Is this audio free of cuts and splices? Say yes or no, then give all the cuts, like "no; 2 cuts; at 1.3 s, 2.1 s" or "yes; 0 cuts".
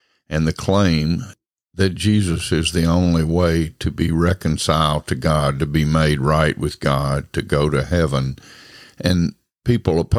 yes; 0 cuts